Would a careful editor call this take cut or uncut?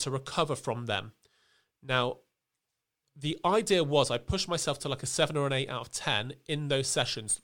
uncut